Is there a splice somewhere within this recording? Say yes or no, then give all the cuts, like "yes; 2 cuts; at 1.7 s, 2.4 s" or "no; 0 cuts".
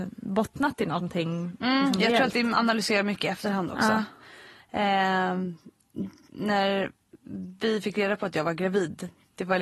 yes; 1 cut; at 2.5 s